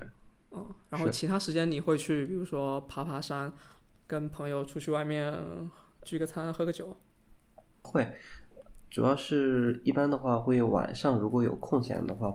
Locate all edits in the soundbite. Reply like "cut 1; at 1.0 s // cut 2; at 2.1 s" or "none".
none